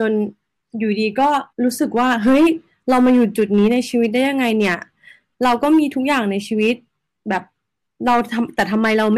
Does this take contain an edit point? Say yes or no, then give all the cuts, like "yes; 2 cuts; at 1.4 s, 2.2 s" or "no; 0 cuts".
yes; 1 cut; at 1.5 s